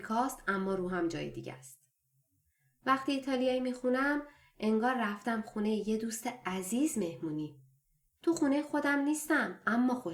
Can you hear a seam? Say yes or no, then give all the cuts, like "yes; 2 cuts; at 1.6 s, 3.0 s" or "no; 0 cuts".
no; 0 cuts